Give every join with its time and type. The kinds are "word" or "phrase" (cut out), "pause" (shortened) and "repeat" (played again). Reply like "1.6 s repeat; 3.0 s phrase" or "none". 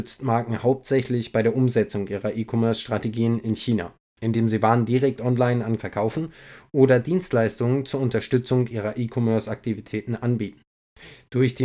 5.8 s word